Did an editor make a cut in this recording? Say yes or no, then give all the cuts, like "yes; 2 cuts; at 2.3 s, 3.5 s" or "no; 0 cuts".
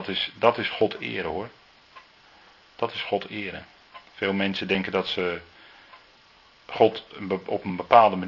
no; 0 cuts